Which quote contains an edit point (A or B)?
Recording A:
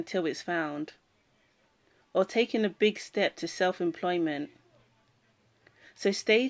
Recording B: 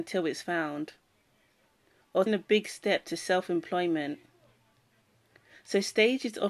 B